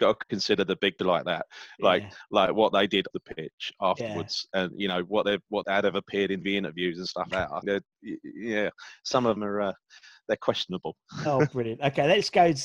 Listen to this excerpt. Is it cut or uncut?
cut